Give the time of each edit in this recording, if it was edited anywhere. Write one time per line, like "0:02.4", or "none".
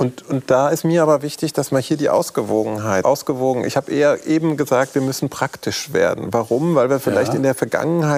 0:03.0